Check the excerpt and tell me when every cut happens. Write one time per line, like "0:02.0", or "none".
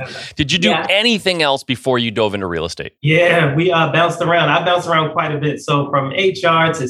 0:03.0